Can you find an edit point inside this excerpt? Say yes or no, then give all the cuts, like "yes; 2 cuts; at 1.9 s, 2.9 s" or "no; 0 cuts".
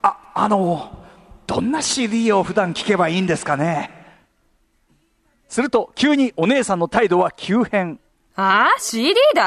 no; 0 cuts